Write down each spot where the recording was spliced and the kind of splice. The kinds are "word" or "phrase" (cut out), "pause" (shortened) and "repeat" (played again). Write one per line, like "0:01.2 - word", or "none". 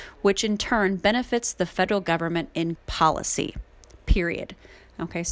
0:02.8 - word